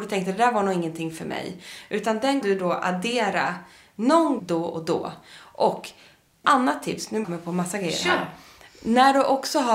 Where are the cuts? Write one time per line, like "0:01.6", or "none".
0:02.4
0:04.4
0:06.4
0:07.2

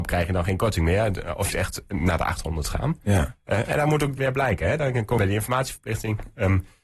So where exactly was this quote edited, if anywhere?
0:01.5
0:04.2
0:05.2

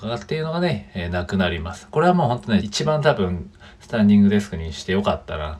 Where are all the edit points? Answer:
0:02.6

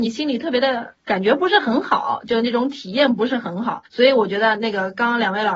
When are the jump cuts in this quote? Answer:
0:03.9

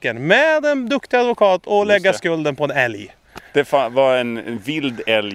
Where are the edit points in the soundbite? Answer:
0:03.5

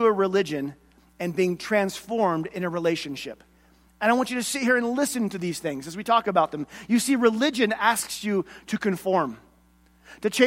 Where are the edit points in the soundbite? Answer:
none

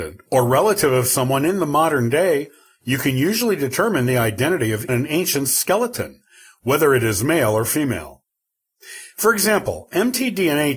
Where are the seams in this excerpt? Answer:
0:04.9

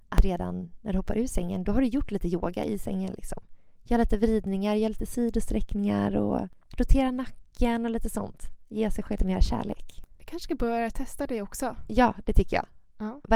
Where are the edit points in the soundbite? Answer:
0:09.2

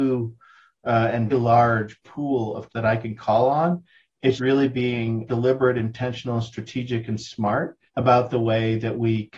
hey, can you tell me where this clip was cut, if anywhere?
0:01.3
0:02.7
0:04.4
0:05.3
0:07.9

